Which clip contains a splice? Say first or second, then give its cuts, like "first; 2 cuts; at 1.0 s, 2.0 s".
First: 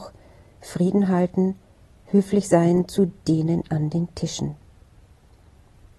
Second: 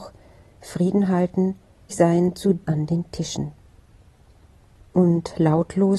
second; 2 cuts; at 1.9 s, 2.6 s